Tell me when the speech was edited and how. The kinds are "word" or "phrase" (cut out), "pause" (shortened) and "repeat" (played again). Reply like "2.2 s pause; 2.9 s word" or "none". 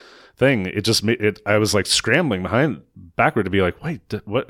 none

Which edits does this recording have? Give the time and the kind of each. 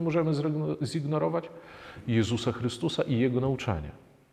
none

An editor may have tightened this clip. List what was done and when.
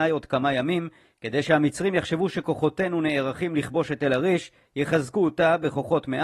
none

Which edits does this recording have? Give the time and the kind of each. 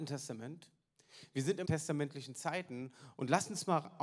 1.6 s word

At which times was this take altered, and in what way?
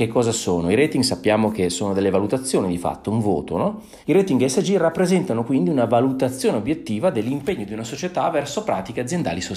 4.0 s pause

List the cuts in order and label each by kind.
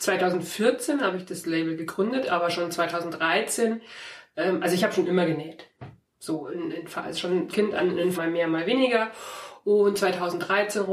7.5 s word; 8.2 s word

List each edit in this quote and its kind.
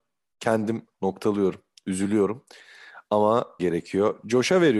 0.9 s word; 3.6 s word

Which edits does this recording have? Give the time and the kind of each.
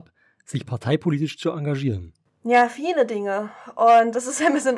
2.3 s pause

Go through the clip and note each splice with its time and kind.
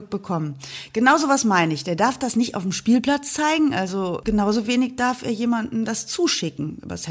4.2 s word

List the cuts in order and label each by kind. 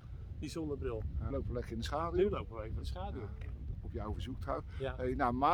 1.3 s word; 2.8 s phrase

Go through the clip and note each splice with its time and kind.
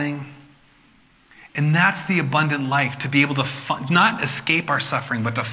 none

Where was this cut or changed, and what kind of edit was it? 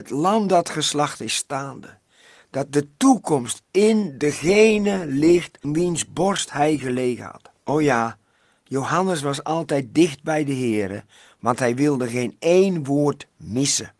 5.6 s word; 7.6 s pause

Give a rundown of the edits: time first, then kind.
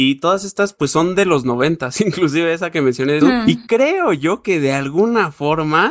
3.2 s word

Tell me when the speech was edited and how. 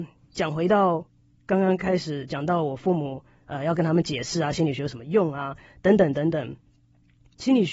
none

